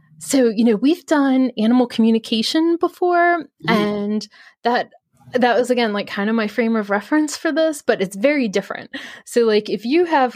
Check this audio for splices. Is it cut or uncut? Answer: uncut